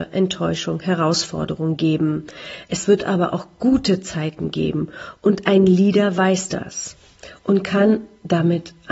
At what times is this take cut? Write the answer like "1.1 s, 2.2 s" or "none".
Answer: none